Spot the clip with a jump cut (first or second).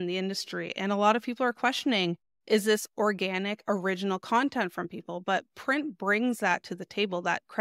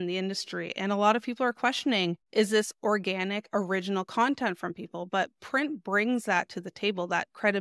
second